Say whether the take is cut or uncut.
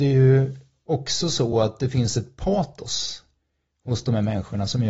uncut